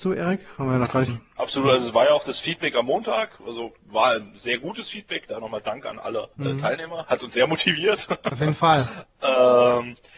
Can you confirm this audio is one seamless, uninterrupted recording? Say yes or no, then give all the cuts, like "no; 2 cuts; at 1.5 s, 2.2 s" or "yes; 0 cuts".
no; 2 cuts; at 1.1 s, 6.3 s